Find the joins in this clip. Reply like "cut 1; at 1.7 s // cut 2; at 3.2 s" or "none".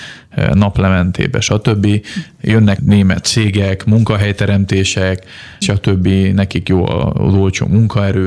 cut 1; at 2.8 s // cut 2; at 3.2 s // cut 3; at 5.6 s